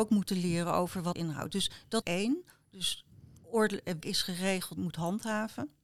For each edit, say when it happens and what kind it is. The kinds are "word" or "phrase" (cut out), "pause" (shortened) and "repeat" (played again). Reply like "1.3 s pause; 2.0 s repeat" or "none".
1.2 s word; 2.0 s word; 4.0 s word; 4.8 s word